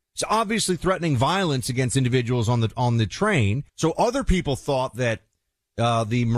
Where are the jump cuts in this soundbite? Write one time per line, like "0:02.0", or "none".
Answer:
0:03.7

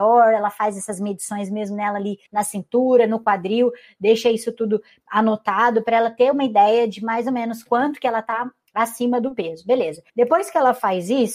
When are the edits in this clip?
0:02.3
0:10.1

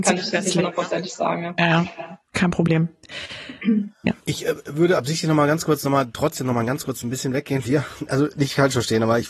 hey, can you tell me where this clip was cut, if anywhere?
0:04.2
0:07.6

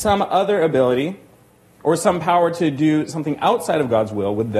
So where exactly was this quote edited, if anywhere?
none

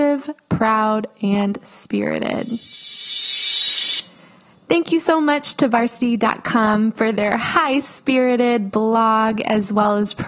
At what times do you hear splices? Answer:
none

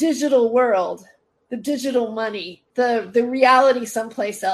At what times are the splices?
0:02.7

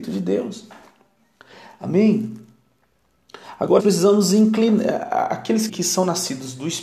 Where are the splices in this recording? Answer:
0:03.8
0:05.7

